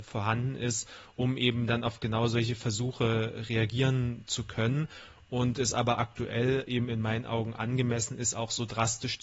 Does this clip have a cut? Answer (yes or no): no